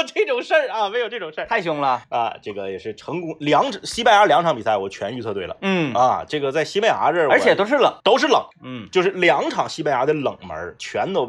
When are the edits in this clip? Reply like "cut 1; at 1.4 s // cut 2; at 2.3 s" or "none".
cut 1; at 2.0 s // cut 2; at 8.0 s // cut 3; at 8.5 s